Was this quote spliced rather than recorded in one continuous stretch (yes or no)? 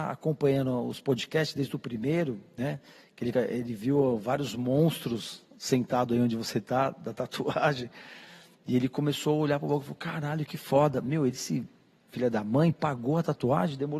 yes